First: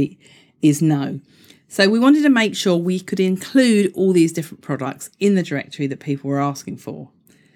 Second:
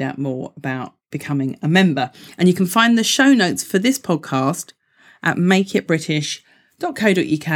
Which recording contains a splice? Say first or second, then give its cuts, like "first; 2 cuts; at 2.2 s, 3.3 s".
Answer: second; 1 cut; at 1.0 s